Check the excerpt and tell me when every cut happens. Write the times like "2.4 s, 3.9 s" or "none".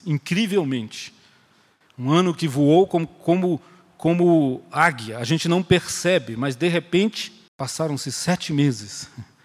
7.5 s